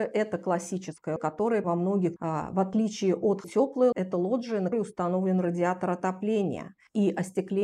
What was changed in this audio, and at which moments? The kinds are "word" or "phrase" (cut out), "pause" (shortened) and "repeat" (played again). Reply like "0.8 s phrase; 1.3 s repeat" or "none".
1.2 s word; 1.6 s word; 2.2 s phrase; 3.4 s word; 3.9 s word; 4.7 s word